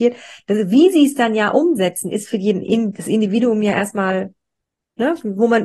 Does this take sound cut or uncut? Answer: uncut